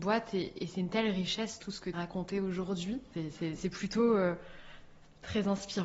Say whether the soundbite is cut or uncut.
cut